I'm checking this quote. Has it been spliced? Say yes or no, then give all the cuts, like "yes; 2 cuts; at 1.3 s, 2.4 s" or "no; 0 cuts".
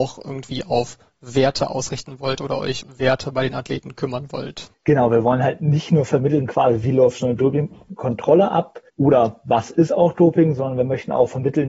yes; 3 cuts; at 2.8 s, 4.7 s, 8.9 s